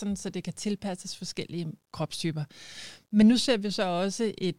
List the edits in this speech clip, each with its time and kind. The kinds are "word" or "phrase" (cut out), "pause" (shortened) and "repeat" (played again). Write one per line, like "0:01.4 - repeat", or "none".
none